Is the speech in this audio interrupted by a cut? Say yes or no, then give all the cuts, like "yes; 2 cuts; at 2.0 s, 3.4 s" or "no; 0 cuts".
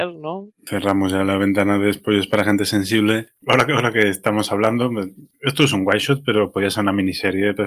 no; 0 cuts